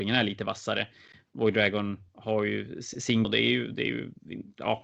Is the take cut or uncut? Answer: cut